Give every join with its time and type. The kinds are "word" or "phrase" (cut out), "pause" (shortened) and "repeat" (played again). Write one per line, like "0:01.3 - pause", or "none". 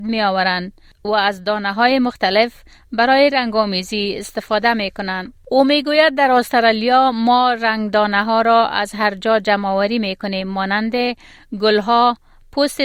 none